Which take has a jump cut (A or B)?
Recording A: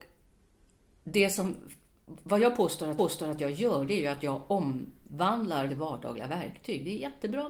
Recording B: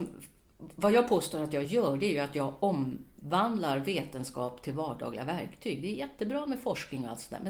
A